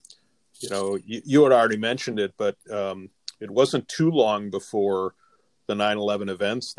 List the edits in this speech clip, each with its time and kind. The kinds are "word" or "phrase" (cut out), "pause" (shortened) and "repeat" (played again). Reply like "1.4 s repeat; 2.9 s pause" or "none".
none